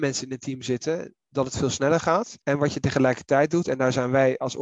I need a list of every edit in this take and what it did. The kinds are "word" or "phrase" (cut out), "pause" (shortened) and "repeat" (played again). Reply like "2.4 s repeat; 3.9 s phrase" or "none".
2.4 s pause